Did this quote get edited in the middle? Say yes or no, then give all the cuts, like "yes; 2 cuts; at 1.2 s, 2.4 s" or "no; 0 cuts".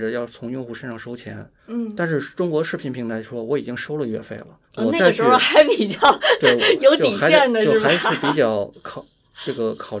yes; 2 cuts; at 1.6 s, 4.7 s